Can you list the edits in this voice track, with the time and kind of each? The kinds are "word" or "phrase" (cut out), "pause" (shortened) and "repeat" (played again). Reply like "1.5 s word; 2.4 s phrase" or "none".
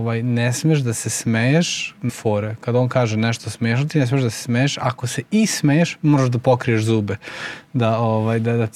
2.1 s word